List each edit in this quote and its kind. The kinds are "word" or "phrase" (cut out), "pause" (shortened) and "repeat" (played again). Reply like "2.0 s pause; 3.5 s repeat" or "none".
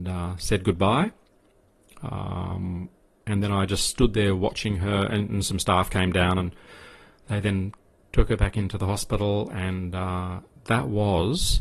none